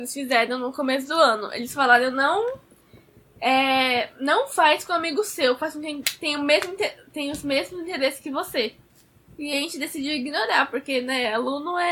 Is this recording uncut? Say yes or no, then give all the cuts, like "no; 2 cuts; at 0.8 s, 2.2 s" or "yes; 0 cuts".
yes; 0 cuts